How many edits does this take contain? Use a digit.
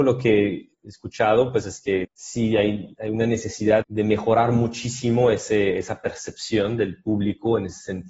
3